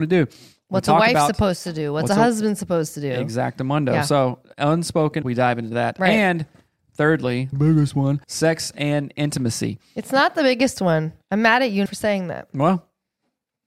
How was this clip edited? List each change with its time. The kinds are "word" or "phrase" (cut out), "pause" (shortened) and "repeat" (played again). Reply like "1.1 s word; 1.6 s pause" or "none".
5.2 s word; 7.5 s phrase; 8.2 s pause; 11.9 s word